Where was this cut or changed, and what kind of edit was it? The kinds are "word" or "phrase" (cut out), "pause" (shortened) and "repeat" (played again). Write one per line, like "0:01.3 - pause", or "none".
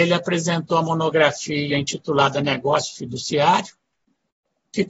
none